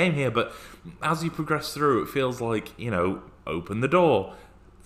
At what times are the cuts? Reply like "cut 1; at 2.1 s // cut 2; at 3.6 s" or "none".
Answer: none